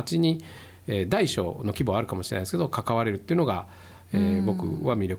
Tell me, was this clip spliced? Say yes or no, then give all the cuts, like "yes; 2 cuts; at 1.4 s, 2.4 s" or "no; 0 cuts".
no; 0 cuts